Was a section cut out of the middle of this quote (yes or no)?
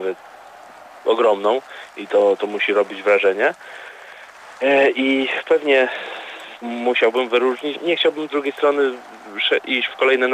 yes